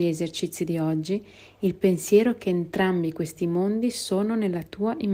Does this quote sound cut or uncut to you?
uncut